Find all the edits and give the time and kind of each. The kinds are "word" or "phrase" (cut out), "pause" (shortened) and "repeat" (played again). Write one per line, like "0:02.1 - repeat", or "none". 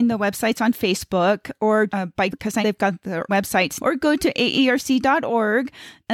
0:01.9 - word
0:02.3 - word
0:02.6 - word
0:03.3 - word
0:03.8 - word